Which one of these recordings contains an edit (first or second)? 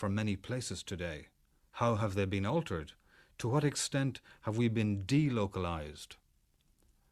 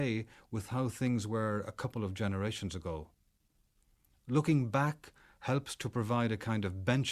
first